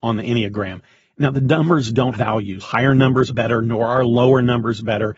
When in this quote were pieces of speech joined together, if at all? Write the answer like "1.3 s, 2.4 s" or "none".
2.1 s, 2.6 s, 3.3 s